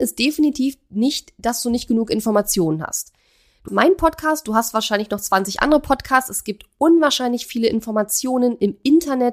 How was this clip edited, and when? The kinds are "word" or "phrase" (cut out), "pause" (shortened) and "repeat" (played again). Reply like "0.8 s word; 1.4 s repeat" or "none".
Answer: 3.7 s word